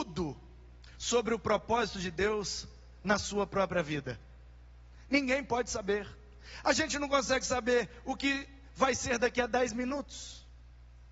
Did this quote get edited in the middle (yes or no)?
no